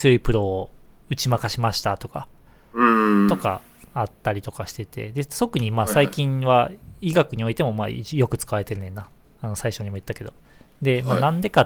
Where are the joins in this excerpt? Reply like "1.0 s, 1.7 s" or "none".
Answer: none